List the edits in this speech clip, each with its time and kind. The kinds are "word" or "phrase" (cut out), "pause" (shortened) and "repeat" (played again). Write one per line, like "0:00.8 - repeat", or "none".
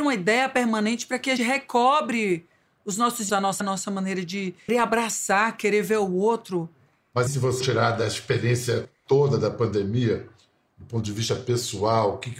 0:01.4 - word
0:03.3 - word
0:03.6 - word
0:04.7 - word
0:07.3 - word
0:07.6 - word